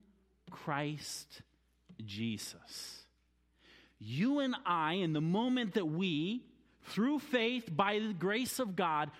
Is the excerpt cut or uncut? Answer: uncut